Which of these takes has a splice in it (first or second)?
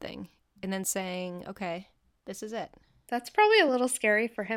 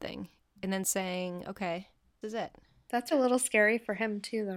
second